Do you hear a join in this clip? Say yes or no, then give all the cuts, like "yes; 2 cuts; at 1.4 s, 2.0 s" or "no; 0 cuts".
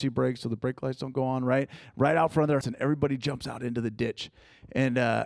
yes; 1 cut; at 2.6 s